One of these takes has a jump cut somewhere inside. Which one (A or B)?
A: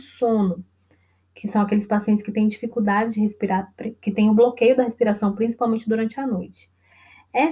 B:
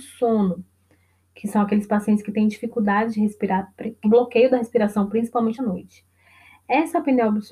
B